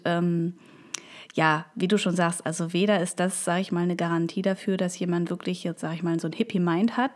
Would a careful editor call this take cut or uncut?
uncut